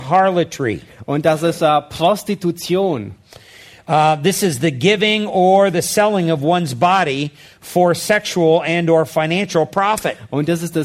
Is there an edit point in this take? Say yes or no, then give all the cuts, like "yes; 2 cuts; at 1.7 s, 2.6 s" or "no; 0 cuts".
no; 0 cuts